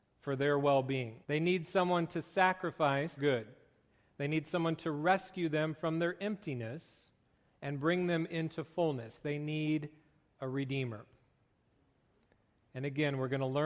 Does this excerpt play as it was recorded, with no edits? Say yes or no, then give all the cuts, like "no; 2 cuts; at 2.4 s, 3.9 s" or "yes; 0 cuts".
no; 2 cuts; at 1.2 s, 3.2 s